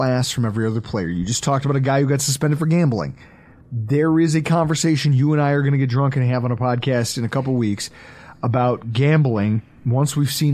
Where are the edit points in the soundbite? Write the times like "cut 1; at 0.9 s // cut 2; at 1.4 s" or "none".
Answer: none